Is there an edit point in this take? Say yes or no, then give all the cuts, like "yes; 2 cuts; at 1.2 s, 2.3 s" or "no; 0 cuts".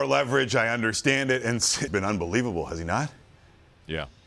yes; 1 cut; at 1.9 s